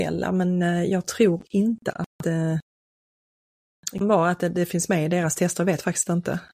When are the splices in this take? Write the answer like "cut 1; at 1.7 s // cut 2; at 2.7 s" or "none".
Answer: cut 1; at 4.0 s